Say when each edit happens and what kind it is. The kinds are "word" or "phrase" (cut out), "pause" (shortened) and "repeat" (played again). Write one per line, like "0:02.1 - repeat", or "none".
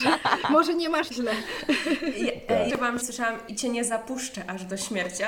0:01.1 - word
0:02.7 - word
0:03.0 - word
0:03.5 - word